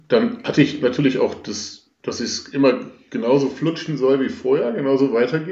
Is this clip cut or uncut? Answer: uncut